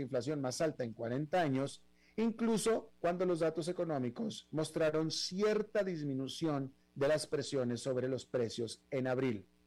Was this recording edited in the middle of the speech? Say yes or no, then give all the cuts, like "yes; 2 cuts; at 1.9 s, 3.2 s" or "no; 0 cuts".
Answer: no; 0 cuts